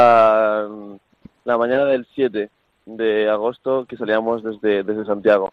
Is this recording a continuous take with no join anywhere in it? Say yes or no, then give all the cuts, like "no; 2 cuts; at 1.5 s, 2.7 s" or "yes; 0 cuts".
yes; 0 cuts